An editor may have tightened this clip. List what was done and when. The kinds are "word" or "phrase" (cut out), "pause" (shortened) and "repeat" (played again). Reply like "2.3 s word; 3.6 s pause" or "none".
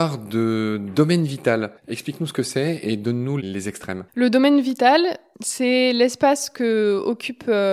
1.8 s pause; 4.1 s pause